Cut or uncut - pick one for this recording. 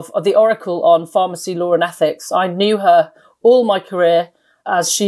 uncut